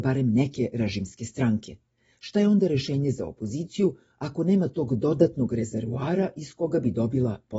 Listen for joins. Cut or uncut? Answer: uncut